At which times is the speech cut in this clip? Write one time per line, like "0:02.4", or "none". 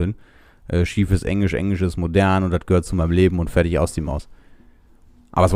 none

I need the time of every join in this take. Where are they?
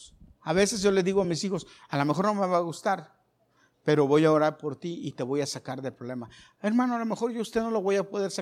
none

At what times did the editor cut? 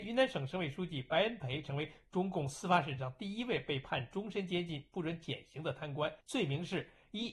0:06.2

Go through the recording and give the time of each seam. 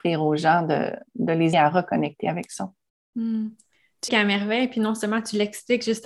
0:01.5
0:04.1

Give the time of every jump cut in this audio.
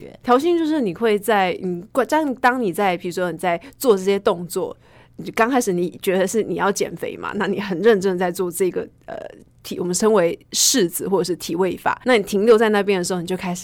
0:12.0

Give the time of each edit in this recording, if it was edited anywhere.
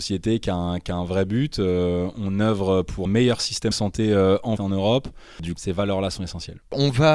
0:03.1
0:03.7
0:04.6
0:05.6

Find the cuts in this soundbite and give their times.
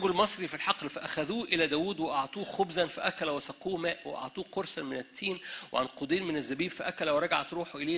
none

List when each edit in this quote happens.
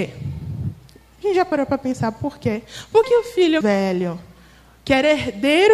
0:03.0
0:03.6

